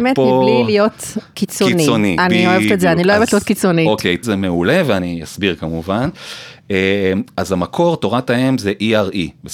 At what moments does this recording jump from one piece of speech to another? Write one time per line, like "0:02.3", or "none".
0:04.2